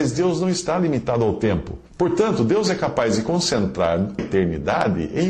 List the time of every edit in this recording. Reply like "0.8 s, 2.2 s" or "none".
1.9 s, 4.2 s